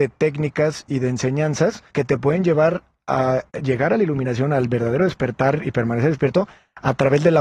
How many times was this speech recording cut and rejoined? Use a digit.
2